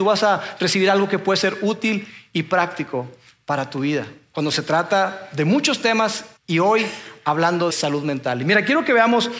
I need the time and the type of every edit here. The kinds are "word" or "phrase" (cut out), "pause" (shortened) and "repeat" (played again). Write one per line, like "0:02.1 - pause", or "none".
0:06.4 - pause
0:07.7 - word

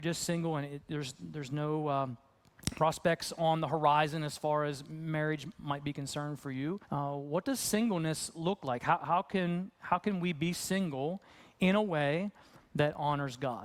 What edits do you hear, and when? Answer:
0:06.8 - pause

